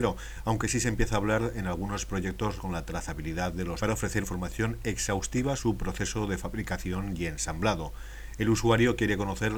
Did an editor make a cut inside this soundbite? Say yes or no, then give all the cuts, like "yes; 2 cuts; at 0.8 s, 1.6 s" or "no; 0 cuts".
yes; 4 cuts; at 2.6 s, 3.8 s, 4.2 s, 5.6 s